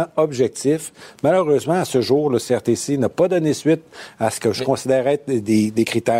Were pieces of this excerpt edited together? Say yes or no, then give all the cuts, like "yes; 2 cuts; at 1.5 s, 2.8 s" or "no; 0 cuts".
no; 0 cuts